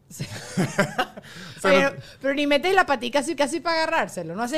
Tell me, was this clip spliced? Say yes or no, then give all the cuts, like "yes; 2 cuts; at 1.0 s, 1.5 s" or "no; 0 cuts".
yes; 1 cut; at 3.4 s